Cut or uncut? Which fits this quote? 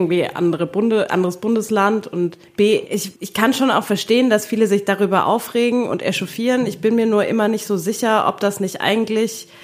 cut